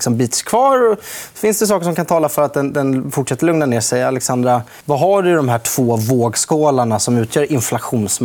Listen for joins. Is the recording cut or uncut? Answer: cut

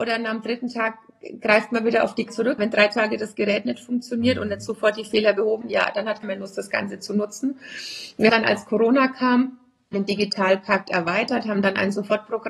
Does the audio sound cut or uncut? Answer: cut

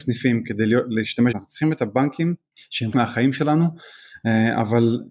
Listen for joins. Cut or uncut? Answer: cut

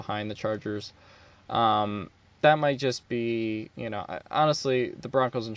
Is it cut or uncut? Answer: cut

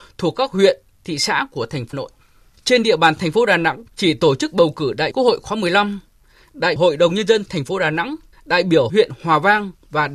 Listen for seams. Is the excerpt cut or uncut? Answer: cut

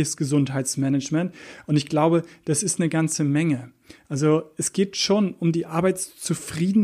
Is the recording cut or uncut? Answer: uncut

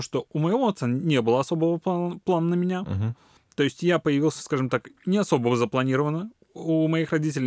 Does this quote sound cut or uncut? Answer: uncut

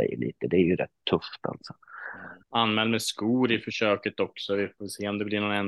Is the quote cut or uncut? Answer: cut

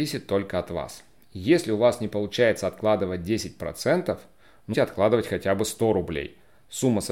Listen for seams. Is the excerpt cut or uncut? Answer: cut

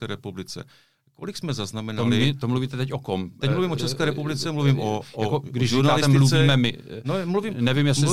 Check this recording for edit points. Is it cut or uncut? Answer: uncut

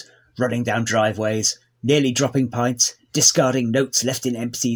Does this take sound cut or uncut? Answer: uncut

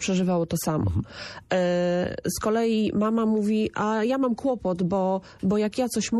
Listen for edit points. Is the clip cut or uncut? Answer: uncut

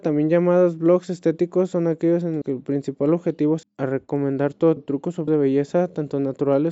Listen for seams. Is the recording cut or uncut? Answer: cut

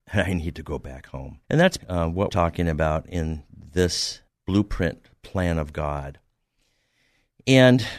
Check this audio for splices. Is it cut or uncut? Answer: cut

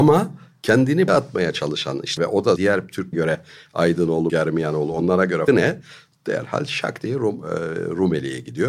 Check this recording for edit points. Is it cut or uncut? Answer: cut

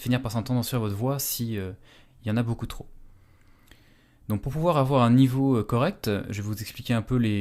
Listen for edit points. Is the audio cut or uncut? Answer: uncut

